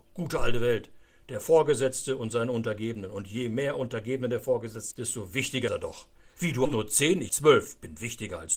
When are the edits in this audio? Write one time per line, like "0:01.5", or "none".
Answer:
0:04.9
0:05.7
0:06.6
0:07.3

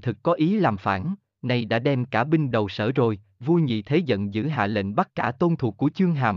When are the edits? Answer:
0:02.5

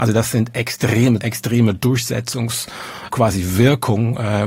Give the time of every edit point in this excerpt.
0:01.2
0:03.1

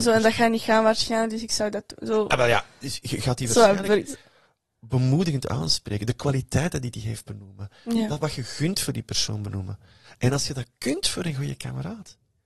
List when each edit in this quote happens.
none

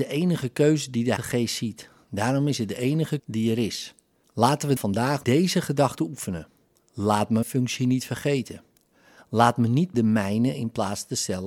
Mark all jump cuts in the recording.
0:01.2
0:03.2
0:04.8
0:05.2
0:07.4
0:09.9

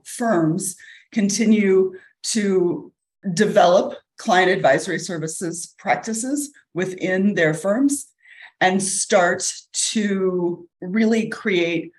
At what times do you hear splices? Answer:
none

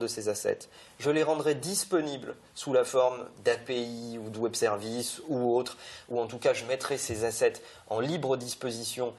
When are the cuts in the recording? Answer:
none

